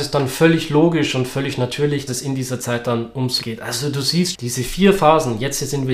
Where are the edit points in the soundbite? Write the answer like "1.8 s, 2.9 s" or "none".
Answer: 2.1 s, 3.4 s, 4.3 s

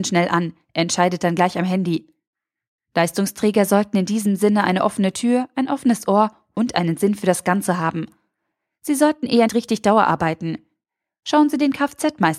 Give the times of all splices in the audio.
9.5 s

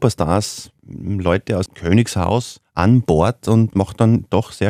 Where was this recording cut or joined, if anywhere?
1.7 s, 3.7 s

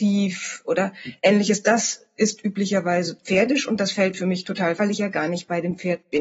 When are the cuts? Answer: 4.8 s

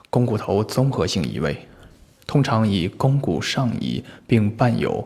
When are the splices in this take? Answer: none

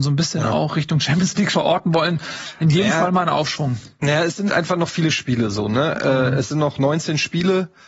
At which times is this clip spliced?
1.5 s, 4.5 s

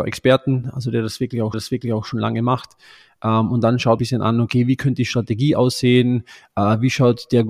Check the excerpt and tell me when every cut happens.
1.5 s, 4.0 s

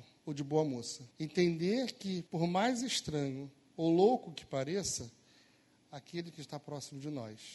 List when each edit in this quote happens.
1.1 s, 2.3 s

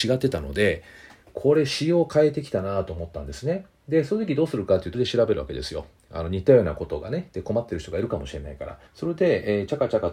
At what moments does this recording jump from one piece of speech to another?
4.9 s, 8.9 s

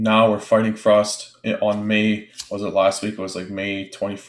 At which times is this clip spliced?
none

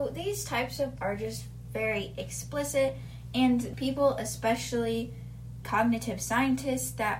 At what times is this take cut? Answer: 1.0 s, 3.7 s, 5.6 s

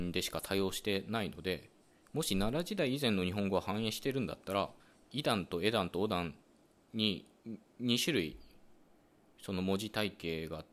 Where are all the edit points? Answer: 4.8 s

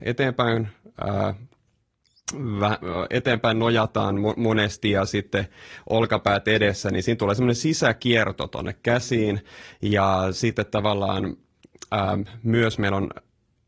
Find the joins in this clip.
none

